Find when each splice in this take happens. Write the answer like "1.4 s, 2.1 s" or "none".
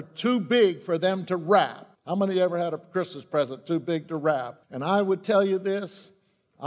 1.9 s, 4.6 s